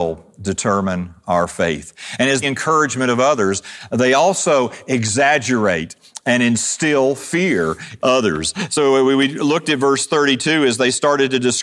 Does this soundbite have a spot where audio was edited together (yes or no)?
yes